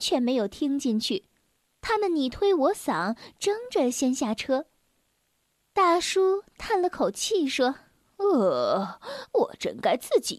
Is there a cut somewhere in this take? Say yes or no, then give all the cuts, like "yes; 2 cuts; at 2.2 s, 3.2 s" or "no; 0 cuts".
no; 0 cuts